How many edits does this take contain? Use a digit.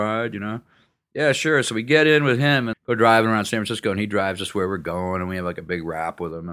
1